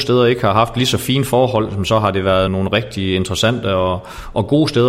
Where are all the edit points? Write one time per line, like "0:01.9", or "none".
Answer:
0:02.5